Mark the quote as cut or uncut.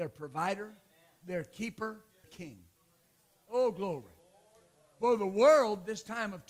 cut